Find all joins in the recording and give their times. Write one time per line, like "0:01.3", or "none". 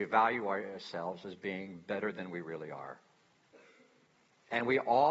none